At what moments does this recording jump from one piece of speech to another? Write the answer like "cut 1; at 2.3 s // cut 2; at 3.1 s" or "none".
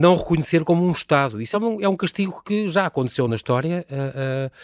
none